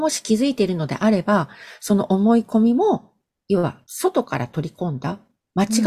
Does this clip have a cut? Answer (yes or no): yes